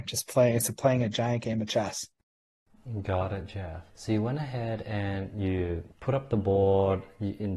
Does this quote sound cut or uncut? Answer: cut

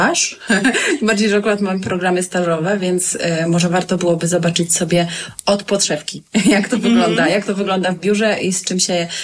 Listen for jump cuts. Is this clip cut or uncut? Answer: uncut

